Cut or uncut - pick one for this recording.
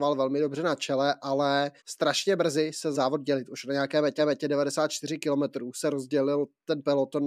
cut